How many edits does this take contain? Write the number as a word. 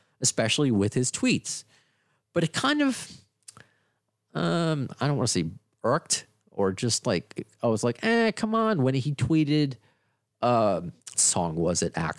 one